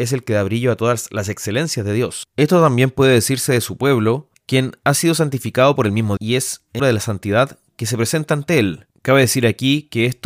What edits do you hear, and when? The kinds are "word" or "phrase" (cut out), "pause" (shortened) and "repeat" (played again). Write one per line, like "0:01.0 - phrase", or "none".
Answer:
0:06.2 - word
0:06.8 - phrase